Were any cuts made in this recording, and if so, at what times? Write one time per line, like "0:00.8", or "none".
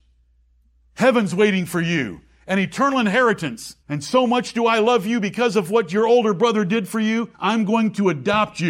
0:03.8
0:07.3